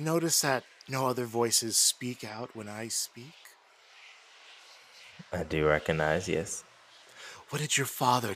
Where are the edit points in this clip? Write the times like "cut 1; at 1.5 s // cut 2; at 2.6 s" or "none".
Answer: none

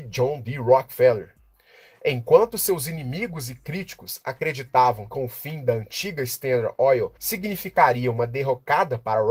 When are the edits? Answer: cut 1; at 5.1 s // cut 2; at 7.2 s

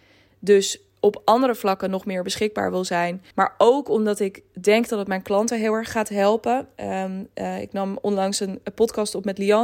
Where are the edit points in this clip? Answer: cut 1; at 3.3 s

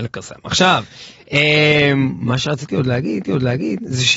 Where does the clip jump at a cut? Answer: cut 1; at 3.2 s

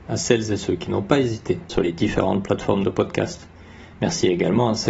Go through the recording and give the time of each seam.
cut 1; at 1.7 s // cut 2; at 3.9 s

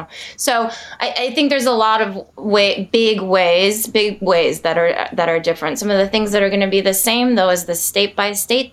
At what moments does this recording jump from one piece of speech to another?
cut 1; at 2.3 s

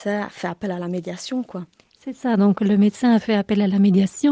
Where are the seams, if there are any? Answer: none

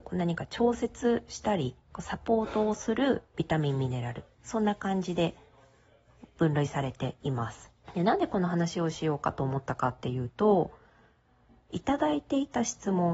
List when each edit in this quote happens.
cut 1; at 1.8 s // cut 2; at 4.3 s // cut 3; at 7.8 s

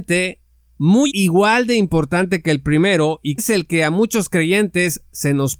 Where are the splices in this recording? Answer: cut 1; at 1.1 s // cut 2; at 3.4 s

